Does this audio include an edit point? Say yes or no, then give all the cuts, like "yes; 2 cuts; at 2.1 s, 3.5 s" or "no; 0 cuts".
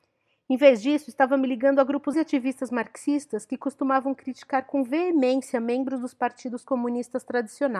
yes; 1 cut; at 2.1 s